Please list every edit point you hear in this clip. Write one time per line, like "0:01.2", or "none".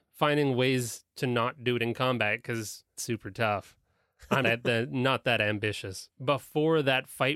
0:03.0
0:04.4